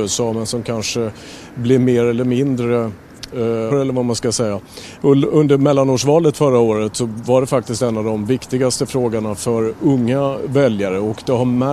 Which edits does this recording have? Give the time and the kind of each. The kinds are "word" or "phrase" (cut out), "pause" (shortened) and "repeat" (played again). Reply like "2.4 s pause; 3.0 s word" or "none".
3.7 s word